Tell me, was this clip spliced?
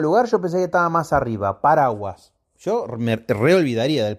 no; 0 cuts

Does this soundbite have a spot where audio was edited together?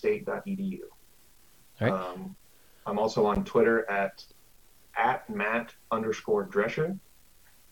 no; 0 cuts

